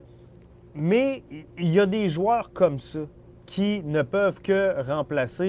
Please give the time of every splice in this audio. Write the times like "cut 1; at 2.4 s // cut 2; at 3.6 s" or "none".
none